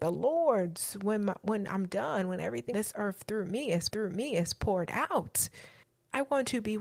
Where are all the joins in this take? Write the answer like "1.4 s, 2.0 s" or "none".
2.7 s, 3.9 s, 5.8 s

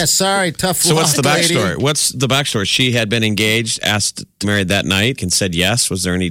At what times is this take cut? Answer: 4.4 s, 5.2 s

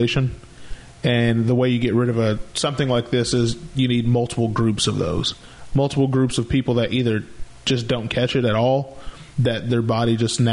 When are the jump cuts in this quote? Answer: 9.3 s

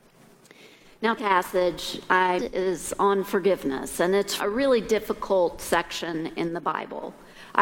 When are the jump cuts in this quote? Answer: 1.2 s, 2.4 s, 4.4 s

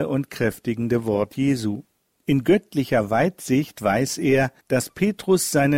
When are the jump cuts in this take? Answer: 2.1 s, 4.6 s

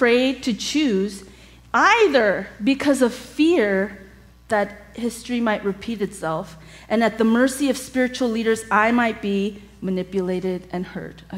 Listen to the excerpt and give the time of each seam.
none

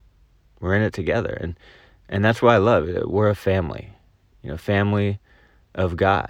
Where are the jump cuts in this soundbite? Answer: none

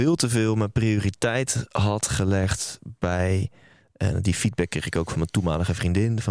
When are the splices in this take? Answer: none

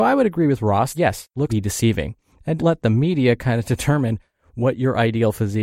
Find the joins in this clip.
0.9 s, 1.5 s, 2.6 s

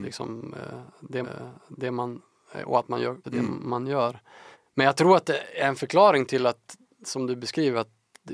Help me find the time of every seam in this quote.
1.2 s, 3.2 s, 4.5 s

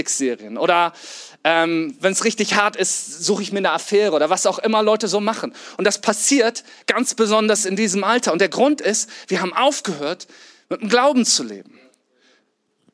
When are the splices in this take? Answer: none

